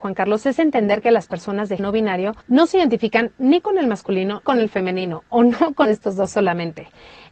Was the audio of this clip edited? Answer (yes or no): yes